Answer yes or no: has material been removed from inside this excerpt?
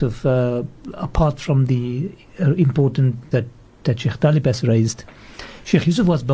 yes